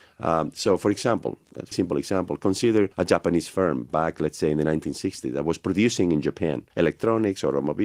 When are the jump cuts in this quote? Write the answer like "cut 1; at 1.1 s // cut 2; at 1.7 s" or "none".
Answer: cut 1; at 1.7 s // cut 2; at 2.9 s // cut 3; at 6.7 s